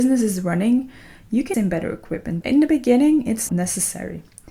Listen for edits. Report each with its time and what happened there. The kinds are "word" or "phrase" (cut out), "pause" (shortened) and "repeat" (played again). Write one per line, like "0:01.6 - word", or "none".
0:01.5 - word
0:02.4 - word
0:03.5 - word